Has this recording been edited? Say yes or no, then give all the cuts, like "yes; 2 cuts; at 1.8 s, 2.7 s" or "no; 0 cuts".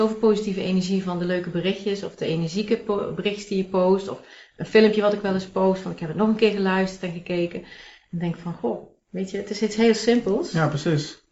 no; 0 cuts